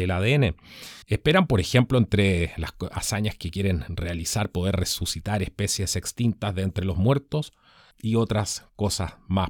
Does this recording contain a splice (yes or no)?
yes